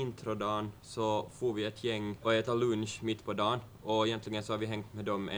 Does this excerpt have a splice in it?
no; 0 cuts

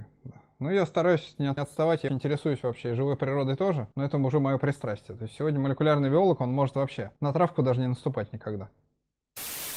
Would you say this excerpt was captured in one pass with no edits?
no; 4 cuts; at 1.6 s, 2.1 s, 3.9 s, 7.2 s

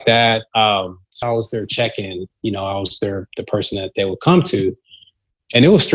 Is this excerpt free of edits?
no; 1 cut; at 1.2 s

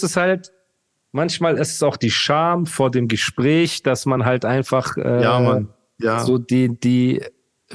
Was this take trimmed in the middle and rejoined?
no; 0 cuts

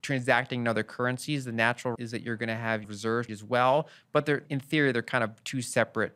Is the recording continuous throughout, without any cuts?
no; 4 cuts; at 1.9 s, 2.8 s, 3.3 s, 4.5 s

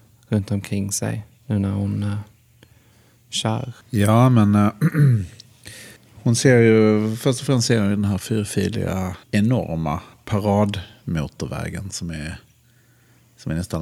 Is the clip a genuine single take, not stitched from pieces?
no; 4 cuts; at 1.3 s, 3.8 s, 6.0 s, 9.2 s

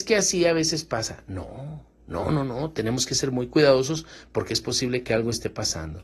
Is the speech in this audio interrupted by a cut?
no; 0 cuts

